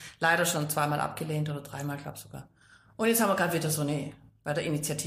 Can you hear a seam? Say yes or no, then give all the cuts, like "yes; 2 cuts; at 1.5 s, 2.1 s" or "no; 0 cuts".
no; 0 cuts